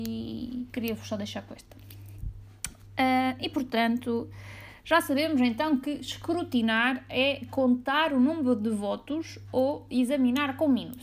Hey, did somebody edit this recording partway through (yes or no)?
no